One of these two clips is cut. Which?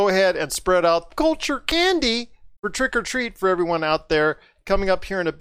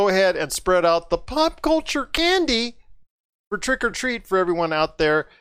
first; 2 cuts; at 1.1 s, 2.6 s

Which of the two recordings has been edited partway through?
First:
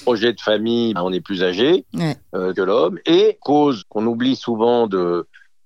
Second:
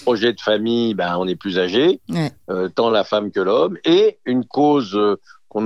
first; 4 cuts; at 1.0 s, 2.5 s, 3.4 s, 3.8 s

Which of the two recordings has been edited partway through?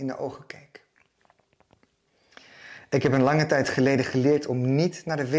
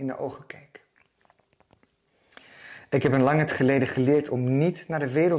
second; 1 cut; at 3.5 s

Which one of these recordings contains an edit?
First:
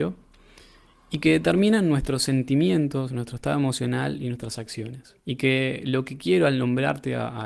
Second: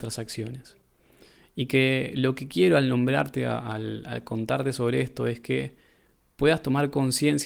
first; 1 cut; at 5.2 s

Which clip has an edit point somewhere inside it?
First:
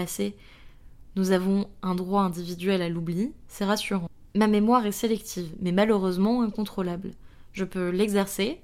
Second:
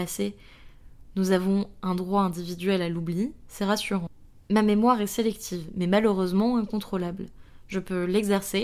first; 1 cut; at 4.3 s

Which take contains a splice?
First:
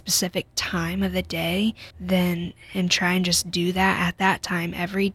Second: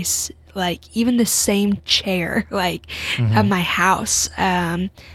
first; 1 cut; at 1.9 s

